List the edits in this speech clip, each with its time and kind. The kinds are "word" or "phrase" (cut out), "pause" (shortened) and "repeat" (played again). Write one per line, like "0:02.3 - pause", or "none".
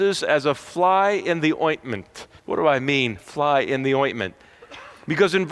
0:02.4 - pause